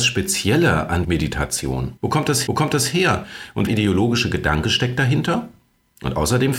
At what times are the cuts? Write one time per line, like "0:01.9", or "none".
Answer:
0:01.0
0:02.0
0:02.5
0:03.7

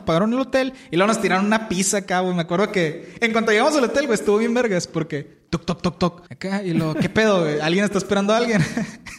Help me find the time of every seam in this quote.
0:05.5
0:06.3

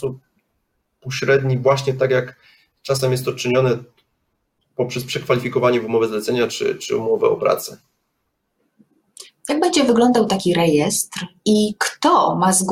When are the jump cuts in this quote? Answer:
none

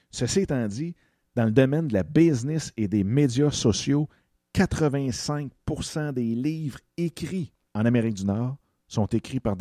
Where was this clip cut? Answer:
0:07.7

